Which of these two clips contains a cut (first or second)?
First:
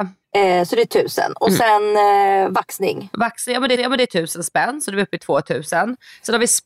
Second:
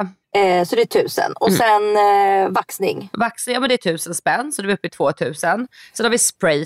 first